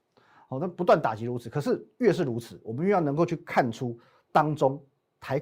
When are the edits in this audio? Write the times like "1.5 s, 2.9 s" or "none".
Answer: none